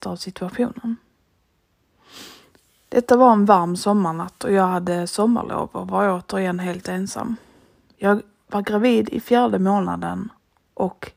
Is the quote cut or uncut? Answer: uncut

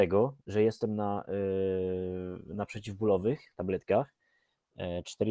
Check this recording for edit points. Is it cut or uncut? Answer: uncut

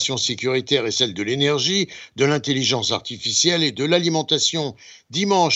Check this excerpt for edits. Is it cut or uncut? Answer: uncut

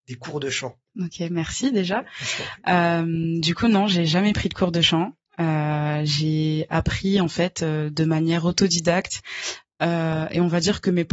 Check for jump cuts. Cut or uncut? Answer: uncut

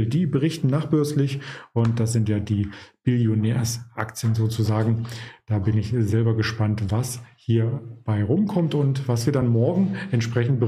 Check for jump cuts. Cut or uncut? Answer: uncut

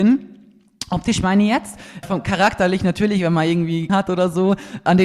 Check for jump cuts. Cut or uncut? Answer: cut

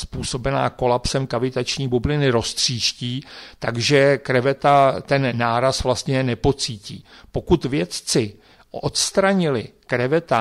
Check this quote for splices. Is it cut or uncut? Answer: uncut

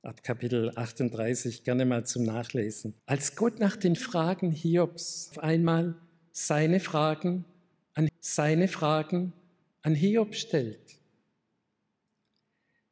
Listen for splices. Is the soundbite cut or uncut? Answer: cut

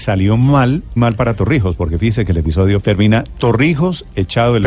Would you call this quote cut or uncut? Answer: cut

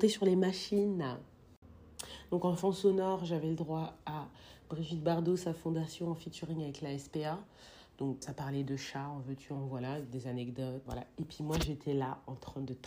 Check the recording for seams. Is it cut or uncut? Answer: cut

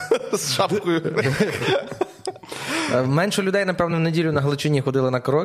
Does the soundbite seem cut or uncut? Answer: uncut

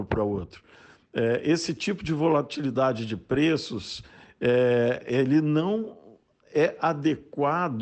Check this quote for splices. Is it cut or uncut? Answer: uncut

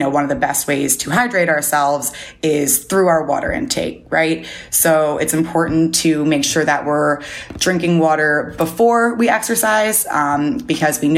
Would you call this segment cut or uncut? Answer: uncut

